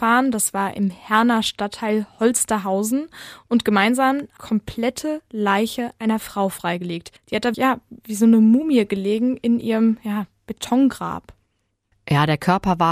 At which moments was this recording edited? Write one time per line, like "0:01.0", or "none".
0:04.4
0:07.2
0:07.5